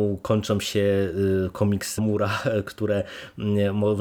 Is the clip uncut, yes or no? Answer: no